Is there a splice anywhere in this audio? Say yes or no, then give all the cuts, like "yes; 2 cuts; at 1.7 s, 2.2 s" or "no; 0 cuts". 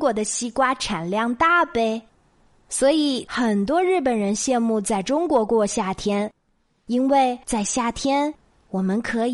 yes; 1 cut; at 7.4 s